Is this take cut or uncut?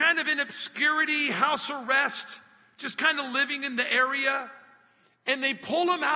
uncut